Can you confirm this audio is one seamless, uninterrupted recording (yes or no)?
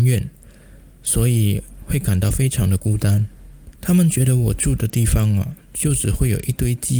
no